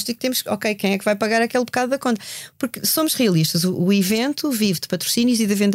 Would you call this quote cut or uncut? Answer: uncut